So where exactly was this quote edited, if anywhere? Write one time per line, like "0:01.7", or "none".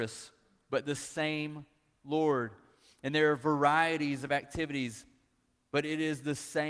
none